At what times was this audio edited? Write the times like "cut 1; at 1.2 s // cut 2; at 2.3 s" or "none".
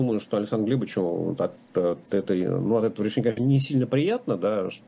none